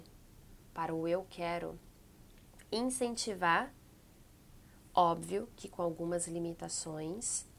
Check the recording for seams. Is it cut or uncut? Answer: uncut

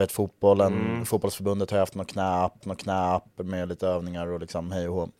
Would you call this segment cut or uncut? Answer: cut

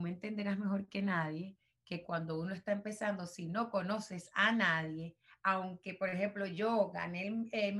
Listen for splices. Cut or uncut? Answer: uncut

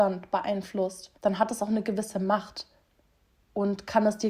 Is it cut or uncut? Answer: cut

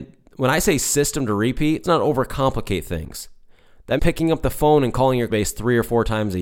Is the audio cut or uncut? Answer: cut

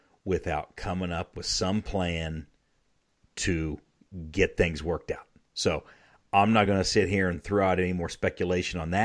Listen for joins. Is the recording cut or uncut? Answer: uncut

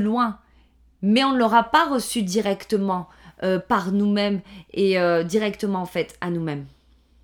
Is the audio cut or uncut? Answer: uncut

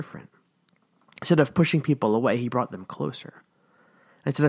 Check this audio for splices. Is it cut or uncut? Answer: uncut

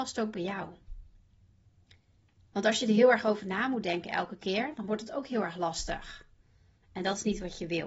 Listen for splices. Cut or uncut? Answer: uncut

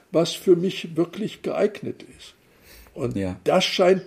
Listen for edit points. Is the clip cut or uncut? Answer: uncut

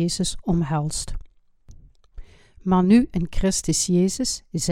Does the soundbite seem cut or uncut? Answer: uncut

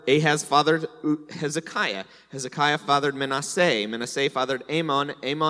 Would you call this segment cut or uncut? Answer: uncut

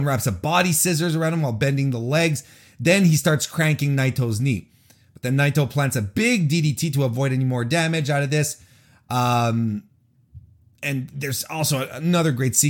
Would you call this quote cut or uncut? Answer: uncut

